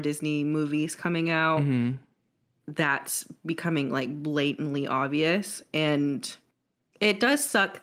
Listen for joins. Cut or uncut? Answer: uncut